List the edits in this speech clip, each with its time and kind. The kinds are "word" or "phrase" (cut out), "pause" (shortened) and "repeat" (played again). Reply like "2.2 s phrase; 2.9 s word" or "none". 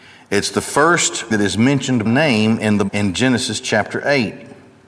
1.3 s word; 2.1 s word; 2.9 s word